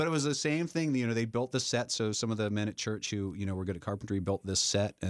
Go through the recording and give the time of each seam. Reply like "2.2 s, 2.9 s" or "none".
none